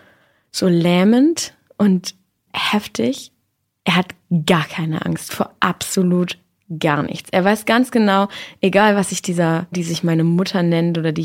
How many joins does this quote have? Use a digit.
2